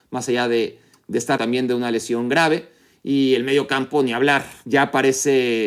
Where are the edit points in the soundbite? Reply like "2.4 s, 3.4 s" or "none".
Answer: 1.4 s